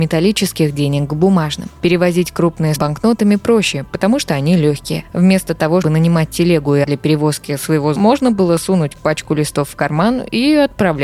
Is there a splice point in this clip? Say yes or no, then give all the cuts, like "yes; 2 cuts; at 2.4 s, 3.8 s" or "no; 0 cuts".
yes; 4 cuts; at 2.8 s, 5.8 s, 6.8 s, 8.0 s